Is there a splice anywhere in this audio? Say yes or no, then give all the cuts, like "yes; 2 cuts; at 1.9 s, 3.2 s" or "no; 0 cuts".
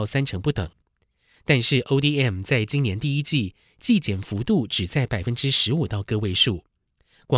no; 0 cuts